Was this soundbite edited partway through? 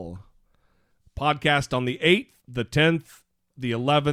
yes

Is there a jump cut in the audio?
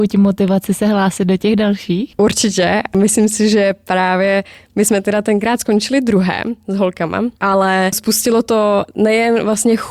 no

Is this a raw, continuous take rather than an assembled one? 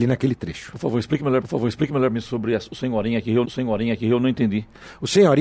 no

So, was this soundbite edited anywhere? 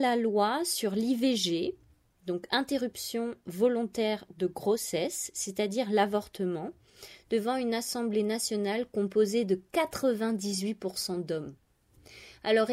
no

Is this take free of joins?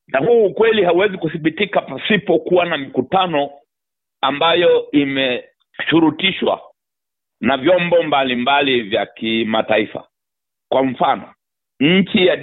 yes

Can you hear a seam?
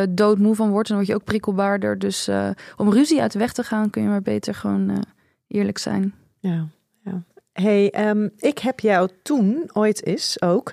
no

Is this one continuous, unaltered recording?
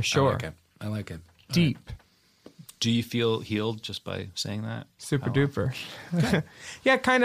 yes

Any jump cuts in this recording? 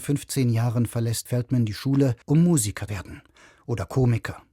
yes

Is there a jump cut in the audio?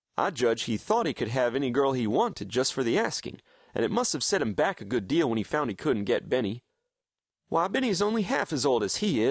no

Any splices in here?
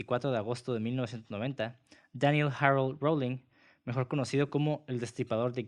no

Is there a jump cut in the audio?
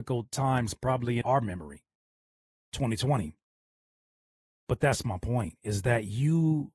yes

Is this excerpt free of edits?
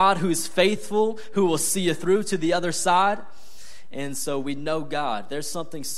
yes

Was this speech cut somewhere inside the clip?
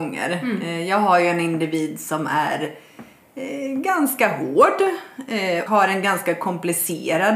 yes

